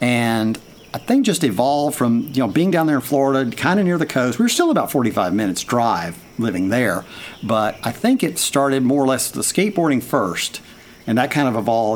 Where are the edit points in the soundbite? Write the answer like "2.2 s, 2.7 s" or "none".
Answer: none